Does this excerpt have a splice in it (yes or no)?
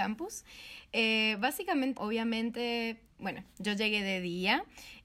yes